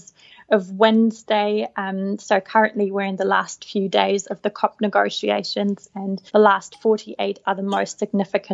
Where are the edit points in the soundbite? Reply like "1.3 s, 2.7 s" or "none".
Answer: 6.3 s, 7.4 s